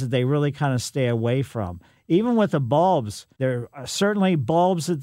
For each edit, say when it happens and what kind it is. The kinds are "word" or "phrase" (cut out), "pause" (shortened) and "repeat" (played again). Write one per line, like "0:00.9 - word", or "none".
0:03.3 - pause